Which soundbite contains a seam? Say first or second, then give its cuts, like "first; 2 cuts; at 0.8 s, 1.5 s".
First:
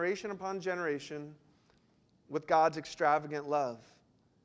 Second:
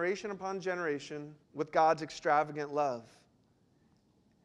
second; 1 cut; at 1.4 s